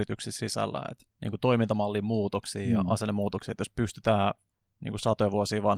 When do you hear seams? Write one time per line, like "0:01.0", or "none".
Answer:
0:01.1
0:04.6